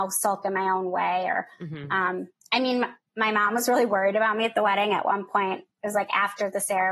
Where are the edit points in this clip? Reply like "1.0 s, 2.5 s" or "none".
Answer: 2.3 s